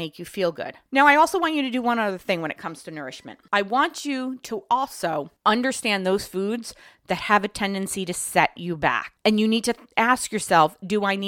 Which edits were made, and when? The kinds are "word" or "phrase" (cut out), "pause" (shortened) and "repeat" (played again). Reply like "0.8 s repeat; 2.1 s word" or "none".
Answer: none